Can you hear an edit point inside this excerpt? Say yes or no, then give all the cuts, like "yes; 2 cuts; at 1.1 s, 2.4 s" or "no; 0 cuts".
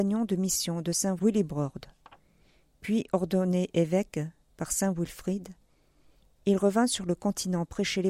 no; 0 cuts